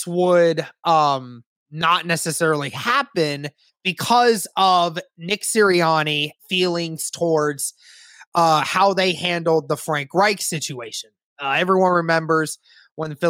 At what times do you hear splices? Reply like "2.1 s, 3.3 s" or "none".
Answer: 3.7 s, 6.4 s

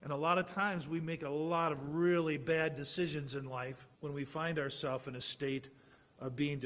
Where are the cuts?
3.9 s

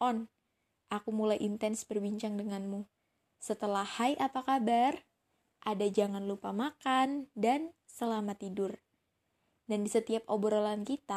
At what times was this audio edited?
none

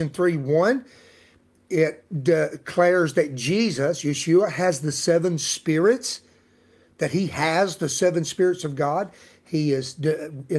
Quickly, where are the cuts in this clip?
none

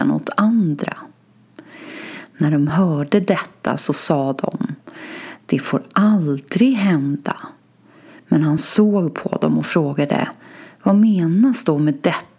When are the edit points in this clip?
none

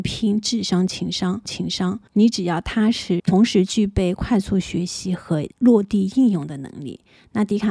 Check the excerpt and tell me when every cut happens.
1.5 s, 3.2 s

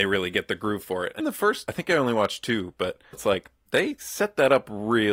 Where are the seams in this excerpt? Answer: 1.2 s, 1.7 s, 3.1 s

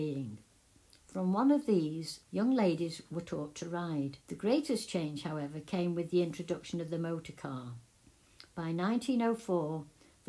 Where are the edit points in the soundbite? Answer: 2.2 s, 4.2 s

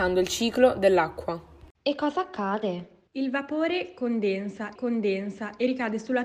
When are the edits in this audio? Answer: 1.7 s, 3.1 s, 4.8 s

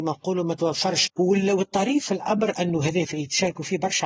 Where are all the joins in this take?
none

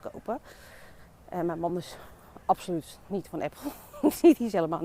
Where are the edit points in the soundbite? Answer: none

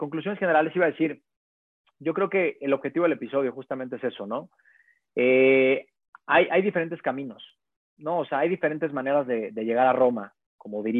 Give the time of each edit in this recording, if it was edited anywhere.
none

